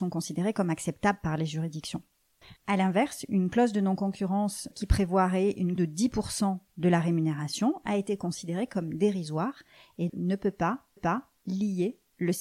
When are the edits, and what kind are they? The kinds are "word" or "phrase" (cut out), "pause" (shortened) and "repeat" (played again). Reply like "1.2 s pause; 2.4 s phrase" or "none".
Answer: 2.6 s pause; 4.7 s word; 5.8 s word; 10.1 s word; 11.0 s repeat